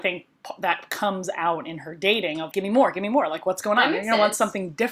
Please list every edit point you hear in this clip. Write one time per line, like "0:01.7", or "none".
0:02.5